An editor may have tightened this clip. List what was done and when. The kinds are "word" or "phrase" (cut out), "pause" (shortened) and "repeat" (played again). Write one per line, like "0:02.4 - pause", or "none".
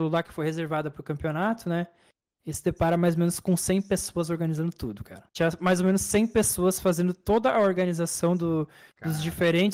0:05.3 - pause